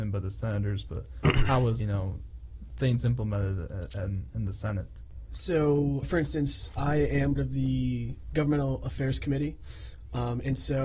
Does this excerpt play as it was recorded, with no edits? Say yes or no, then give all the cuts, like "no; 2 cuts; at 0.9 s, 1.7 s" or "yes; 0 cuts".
no; 4 cuts; at 1.8 s, 6.0 s, 6.8 s, 7.4 s